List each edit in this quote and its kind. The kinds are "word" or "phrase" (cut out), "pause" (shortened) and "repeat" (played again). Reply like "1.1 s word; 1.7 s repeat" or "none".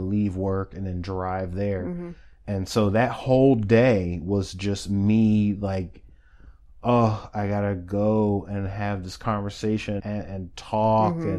10.0 s word